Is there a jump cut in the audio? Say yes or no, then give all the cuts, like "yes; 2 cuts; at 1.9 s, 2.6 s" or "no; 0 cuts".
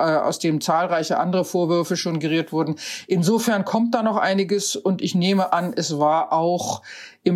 no; 0 cuts